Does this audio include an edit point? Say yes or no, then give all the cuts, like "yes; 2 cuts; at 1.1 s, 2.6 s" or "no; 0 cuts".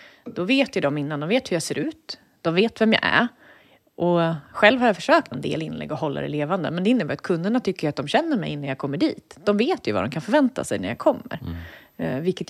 yes; 1 cut; at 5.3 s